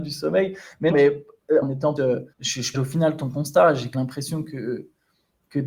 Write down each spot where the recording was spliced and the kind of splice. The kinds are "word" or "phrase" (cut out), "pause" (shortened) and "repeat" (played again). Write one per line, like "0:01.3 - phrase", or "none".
0:00.9 - word
0:01.6 - word
0:02.0 - word
0:02.3 - pause
0:02.7 - word
0:03.9 - word